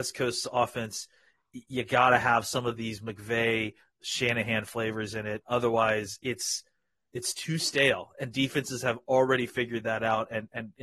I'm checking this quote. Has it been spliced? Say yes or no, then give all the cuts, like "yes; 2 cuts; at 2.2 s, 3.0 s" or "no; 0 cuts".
no; 0 cuts